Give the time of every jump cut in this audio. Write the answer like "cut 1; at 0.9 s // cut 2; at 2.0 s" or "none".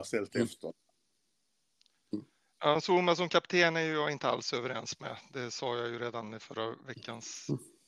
none